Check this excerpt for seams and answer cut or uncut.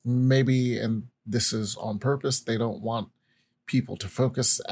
uncut